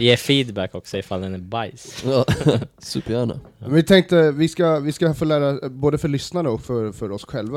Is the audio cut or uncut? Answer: uncut